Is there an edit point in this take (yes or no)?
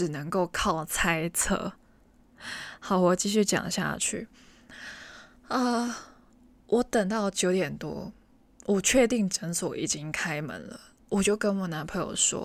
no